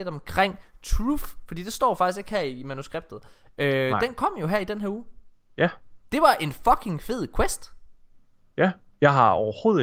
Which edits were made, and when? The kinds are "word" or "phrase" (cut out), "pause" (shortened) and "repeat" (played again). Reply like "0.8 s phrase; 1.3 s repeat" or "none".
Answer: none